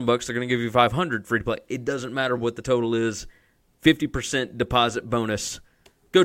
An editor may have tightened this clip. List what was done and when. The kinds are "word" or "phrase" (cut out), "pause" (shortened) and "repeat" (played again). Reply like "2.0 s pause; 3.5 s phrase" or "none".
none